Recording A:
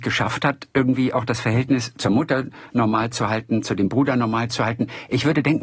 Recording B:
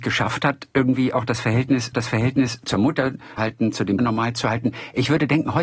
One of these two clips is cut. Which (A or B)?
B